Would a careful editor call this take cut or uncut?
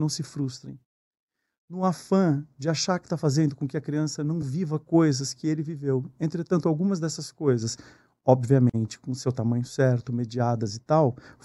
uncut